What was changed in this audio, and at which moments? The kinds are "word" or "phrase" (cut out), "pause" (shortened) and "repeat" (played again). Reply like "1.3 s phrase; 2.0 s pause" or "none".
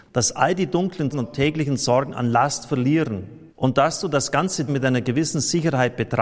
1.1 s word; 3.5 s pause; 4.7 s word